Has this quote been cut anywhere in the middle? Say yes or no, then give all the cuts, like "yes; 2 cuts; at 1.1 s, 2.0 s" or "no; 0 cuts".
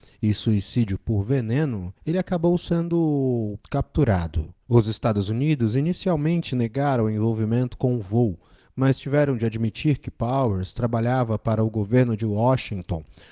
yes; 1 cut; at 2.0 s